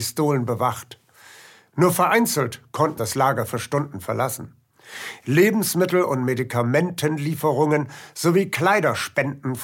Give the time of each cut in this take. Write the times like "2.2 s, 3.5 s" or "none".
3.0 s

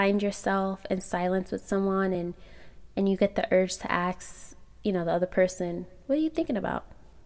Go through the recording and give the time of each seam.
none

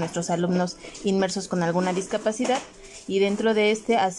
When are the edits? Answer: none

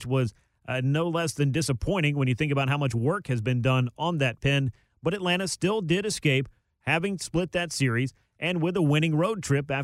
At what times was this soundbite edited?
none

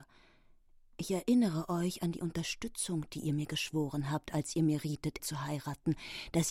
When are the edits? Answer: 5.2 s

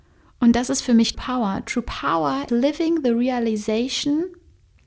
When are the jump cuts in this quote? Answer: 1.1 s, 2.5 s

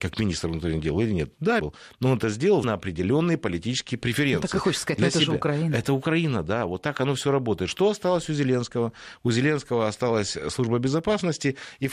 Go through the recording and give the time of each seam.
1.6 s, 2.6 s

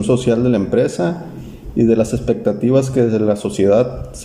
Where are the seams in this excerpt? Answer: none

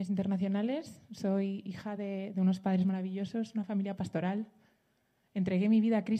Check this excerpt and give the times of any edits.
none

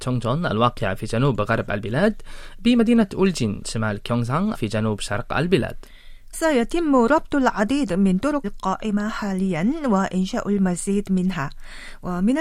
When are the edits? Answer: 3.6 s, 4.5 s, 6.3 s, 8.4 s

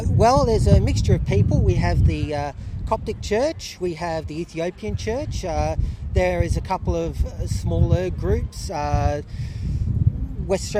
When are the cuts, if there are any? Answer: none

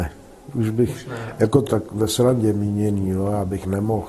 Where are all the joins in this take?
1.7 s

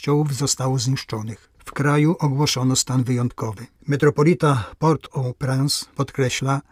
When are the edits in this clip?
3.8 s

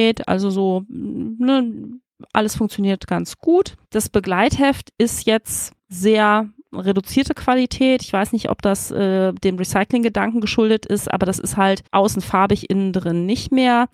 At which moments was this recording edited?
3.8 s, 5.8 s, 11.9 s

